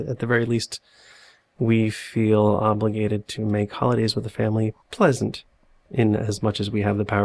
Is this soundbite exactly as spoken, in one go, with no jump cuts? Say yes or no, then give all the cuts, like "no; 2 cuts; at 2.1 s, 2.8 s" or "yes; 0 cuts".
yes; 0 cuts